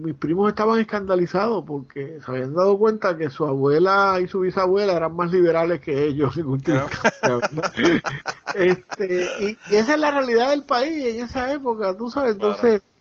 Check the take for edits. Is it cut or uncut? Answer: uncut